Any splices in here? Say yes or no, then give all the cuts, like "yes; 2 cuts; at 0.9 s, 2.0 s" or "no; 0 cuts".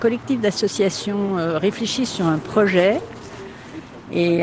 no; 0 cuts